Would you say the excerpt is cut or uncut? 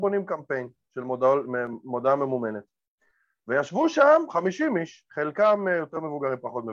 uncut